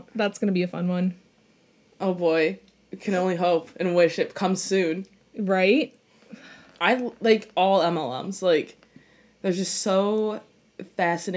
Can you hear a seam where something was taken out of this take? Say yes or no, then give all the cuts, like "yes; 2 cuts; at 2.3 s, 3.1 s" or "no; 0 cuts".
no; 0 cuts